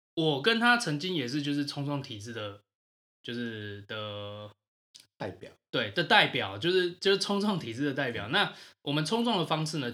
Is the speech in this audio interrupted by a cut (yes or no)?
no